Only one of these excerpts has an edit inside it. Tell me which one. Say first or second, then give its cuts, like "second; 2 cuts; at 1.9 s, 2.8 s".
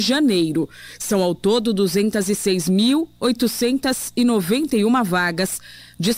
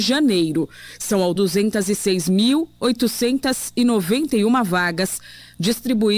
second; 1 cut; at 1.4 s